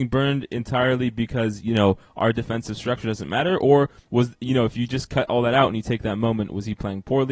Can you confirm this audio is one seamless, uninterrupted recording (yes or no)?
yes